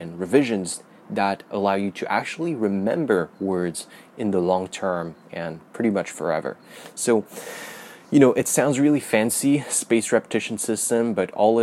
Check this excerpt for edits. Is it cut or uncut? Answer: uncut